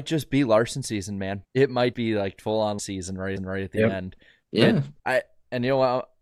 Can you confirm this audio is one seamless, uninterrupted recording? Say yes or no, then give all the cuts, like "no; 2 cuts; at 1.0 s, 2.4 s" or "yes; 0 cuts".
no; 5 cuts; at 1.4 s, 1.9 s, 2.8 s, 3.4 s, 5.0 s